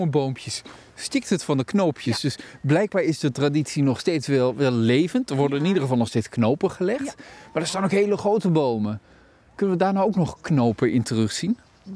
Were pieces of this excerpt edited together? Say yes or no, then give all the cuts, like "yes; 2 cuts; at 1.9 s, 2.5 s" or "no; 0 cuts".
no; 0 cuts